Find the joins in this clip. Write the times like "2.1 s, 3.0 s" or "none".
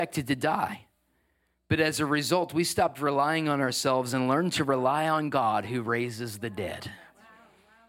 none